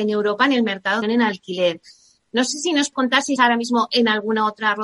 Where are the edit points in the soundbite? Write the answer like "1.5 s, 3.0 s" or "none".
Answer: 1.0 s, 2.9 s, 3.4 s